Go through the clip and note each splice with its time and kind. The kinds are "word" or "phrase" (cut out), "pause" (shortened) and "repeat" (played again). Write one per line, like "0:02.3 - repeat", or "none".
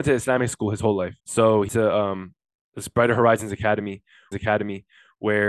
0:01.2 - pause
0:01.7 - word
0:04.3 - repeat